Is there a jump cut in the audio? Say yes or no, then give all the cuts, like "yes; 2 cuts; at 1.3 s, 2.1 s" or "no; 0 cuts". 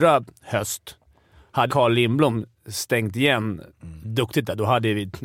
yes; 1 cut; at 1.7 s